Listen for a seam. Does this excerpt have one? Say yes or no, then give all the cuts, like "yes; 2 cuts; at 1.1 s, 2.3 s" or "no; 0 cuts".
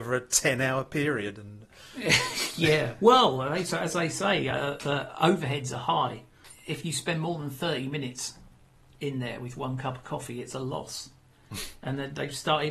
no; 0 cuts